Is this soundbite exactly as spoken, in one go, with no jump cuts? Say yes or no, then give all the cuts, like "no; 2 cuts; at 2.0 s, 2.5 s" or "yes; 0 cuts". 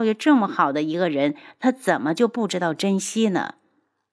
yes; 0 cuts